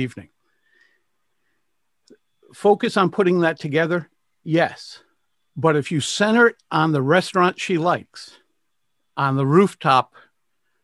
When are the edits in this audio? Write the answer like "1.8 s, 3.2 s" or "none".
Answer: none

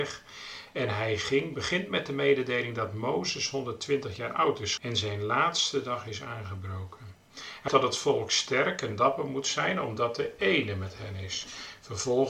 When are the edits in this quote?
4.8 s, 7.7 s

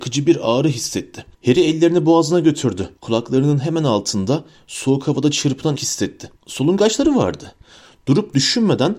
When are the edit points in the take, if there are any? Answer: 1.3 s, 3.0 s, 5.8 s, 6.4 s

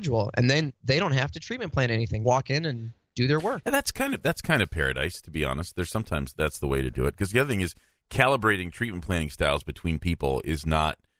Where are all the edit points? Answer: 2.2 s, 6.3 s

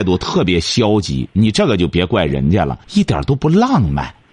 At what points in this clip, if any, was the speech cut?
2.8 s

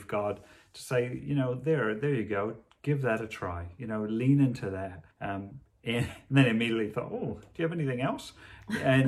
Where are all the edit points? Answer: 5.1 s

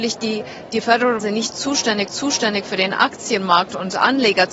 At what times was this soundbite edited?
1.2 s, 2.1 s

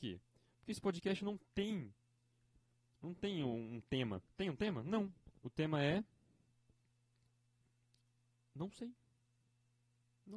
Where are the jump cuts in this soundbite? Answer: 4.3 s, 5.4 s

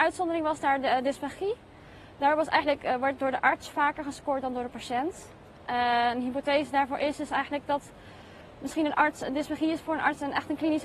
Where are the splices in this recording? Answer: none

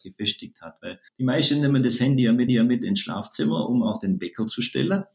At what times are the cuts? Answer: 1.1 s, 2.5 s

